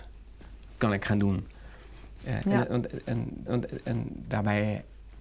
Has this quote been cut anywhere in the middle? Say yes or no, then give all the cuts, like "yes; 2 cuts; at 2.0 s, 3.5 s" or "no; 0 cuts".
yes; 1 cut; at 3.5 s